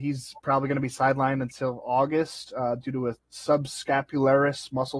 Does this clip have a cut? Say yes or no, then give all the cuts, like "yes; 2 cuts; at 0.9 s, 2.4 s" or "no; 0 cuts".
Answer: no; 0 cuts